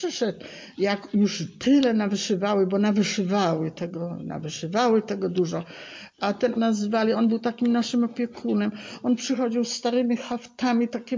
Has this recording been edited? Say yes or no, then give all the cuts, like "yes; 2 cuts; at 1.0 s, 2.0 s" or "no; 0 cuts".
yes; 1 cut; at 6.6 s